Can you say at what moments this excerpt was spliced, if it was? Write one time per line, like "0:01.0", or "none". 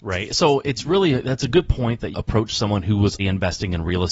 0:02.1
0:03.2